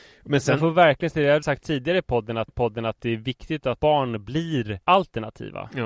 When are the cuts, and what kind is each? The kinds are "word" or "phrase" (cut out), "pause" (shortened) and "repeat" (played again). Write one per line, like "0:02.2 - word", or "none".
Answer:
0:01.4 - word
0:02.5 - repeat
0:03.8 - word
0:04.8 - pause

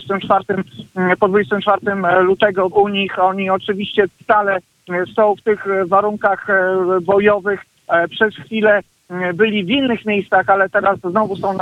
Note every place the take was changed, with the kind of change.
0:02.7 - word

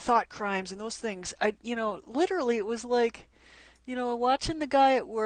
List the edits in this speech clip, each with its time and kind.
none

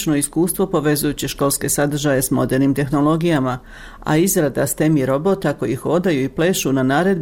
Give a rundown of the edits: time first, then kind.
none

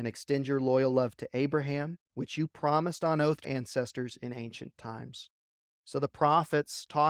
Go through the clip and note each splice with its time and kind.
0:02.1 - pause
0:03.4 - word

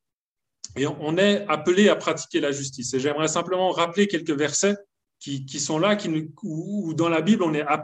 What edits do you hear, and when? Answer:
0:05.1 - word

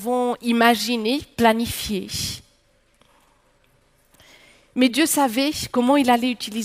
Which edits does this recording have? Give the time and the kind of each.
none

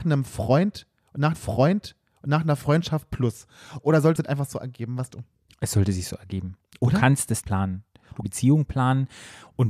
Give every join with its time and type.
0:01.3 - repeat
0:04.2 - phrase
0:05.1 - word
0:07.4 - word
0:08.2 - phrase

